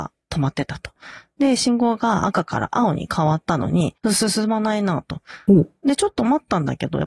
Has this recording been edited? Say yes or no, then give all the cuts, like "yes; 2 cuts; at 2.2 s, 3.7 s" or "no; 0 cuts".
yes; 1 cut; at 4.0 s